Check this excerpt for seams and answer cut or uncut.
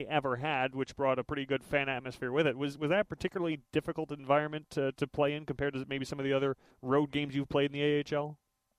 cut